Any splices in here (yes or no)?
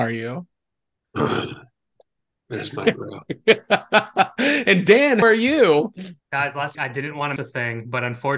yes